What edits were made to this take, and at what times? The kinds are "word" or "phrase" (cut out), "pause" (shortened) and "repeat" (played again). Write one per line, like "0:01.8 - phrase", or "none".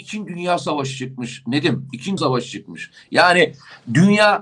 0:02.2 - word

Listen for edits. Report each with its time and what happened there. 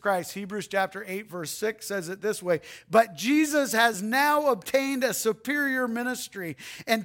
none

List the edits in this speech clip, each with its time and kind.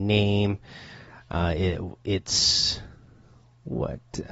none

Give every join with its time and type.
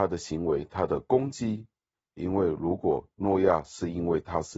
none

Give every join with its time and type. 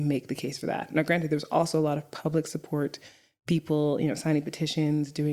none

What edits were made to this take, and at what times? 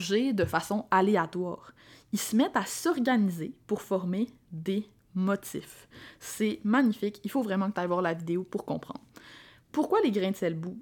none

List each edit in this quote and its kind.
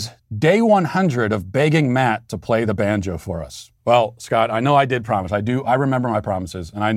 0:03.8 - pause

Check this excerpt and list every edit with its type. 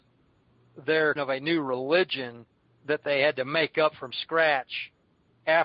0:01.2 - word
0:02.6 - pause

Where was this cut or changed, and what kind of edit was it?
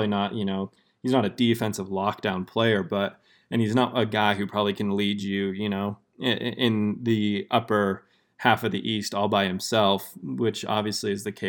none

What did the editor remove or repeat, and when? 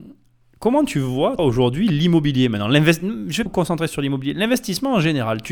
0:01.4 - word
0:03.5 - word

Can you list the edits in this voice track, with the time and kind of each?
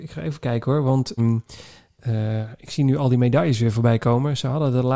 0:01.2 - word

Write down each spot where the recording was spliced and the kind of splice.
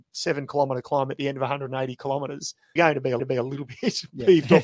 0:02.8 - word
0:03.2 - repeat

